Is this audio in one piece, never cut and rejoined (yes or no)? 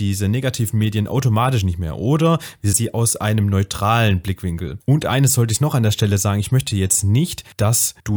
no